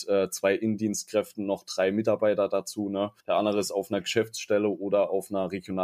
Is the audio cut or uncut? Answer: cut